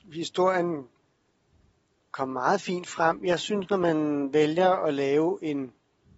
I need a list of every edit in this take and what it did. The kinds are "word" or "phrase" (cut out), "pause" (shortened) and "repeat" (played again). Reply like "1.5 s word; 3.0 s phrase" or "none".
none